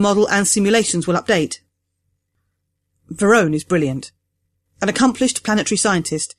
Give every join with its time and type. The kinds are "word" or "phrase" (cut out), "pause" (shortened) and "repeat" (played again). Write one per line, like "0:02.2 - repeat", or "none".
none